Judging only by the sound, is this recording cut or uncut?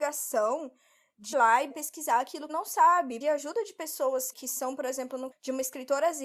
cut